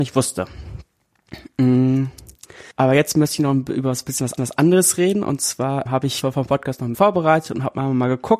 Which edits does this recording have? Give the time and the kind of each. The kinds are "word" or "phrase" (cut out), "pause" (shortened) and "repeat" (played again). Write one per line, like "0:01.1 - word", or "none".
0:02.7 - pause
0:04.4 - repeat
0:05.9 - word
0:06.2 - phrase
0:06.9 - word